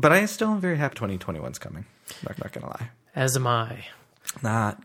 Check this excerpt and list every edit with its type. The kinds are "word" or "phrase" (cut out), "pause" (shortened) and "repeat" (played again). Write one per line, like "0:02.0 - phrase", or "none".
0:00.9 - word
0:02.4 - repeat